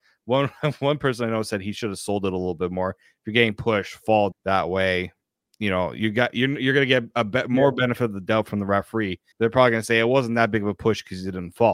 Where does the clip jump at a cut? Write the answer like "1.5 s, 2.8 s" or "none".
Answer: 4.3 s, 9.3 s